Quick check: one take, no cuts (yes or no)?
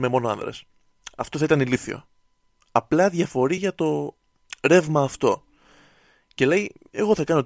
yes